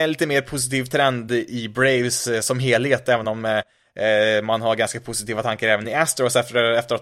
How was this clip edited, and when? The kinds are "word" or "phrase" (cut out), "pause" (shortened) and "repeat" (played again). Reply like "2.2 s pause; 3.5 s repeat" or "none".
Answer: none

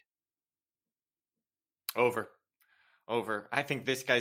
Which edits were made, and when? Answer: none

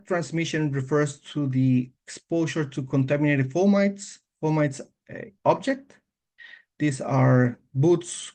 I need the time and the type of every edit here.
2.0 s pause; 4.9 s phrase; 5.4 s pause

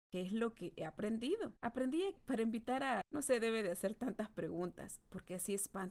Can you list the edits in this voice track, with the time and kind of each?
2.2 s word; 3.0 s word

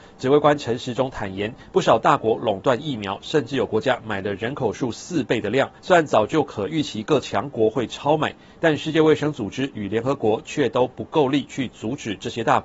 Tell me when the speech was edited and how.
5.8 s pause

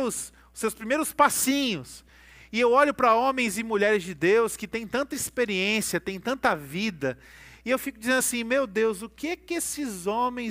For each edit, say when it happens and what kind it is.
none

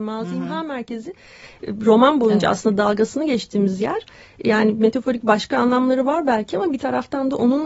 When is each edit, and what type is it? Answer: none

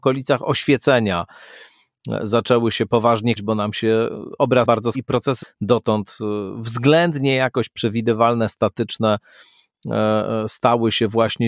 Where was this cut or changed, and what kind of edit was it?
3.4 s word; 4.6 s word; 4.9 s word; 5.4 s word

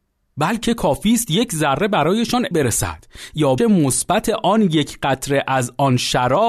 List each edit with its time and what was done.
2.5 s word; 3.6 s word

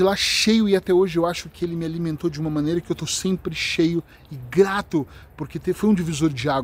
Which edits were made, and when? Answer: none

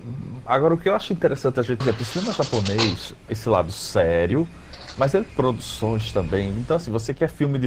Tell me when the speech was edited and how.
1.8 s phrase; 3.3 s phrase; 5.3 s word

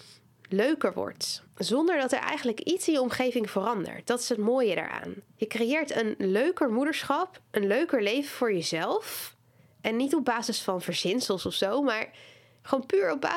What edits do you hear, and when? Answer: 1.5 s pause; 5.3 s pause; 9.6 s pause

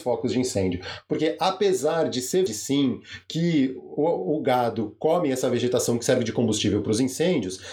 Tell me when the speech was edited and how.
2.5 s word

